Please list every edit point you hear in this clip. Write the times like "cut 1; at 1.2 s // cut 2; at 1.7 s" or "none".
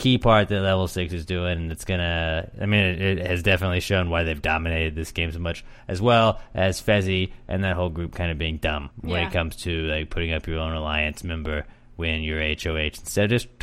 cut 1; at 8.9 s